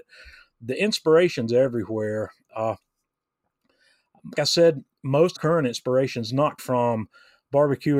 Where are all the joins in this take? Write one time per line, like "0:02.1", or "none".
0:04.3
0:05.4
0:06.6